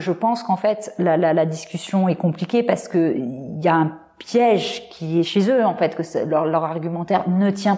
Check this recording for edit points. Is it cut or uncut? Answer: uncut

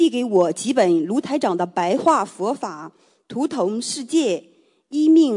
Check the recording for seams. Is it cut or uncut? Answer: uncut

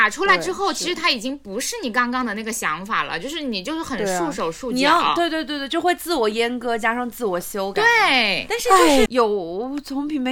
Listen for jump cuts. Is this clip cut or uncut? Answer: cut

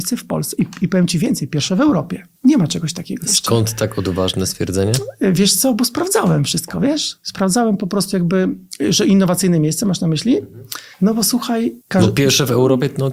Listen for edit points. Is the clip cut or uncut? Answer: cut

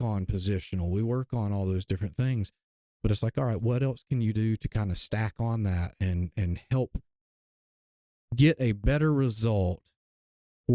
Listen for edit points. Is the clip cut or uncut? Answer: uncut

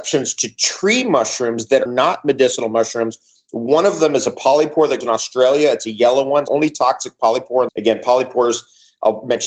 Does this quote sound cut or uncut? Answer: cut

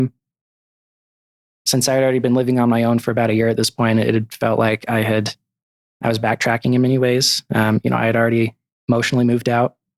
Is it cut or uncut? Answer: uncut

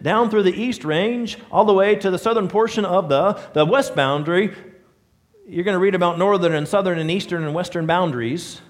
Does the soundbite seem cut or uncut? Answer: uncut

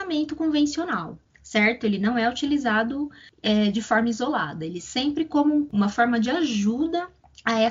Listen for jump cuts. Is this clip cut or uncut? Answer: uncut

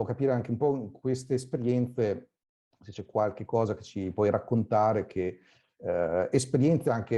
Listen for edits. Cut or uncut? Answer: uncut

